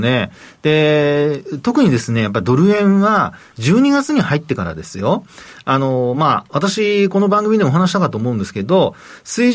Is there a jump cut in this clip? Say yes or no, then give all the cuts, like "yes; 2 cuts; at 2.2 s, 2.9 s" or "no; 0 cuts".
no; 0 cuts